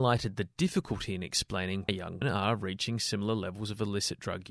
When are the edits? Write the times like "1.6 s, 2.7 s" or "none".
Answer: 1.9 s, 2.2 s